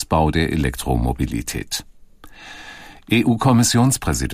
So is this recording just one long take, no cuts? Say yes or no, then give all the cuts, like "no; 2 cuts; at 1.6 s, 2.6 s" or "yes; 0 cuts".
yes; 0 cuts